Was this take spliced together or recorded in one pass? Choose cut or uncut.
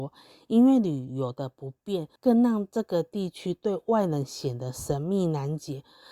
cut